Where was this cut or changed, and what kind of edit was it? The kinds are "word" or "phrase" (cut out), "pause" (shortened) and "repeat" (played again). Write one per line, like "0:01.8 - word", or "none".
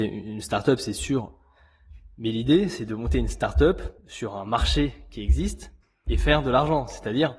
0:04.0 - pause
0:05.8 - pause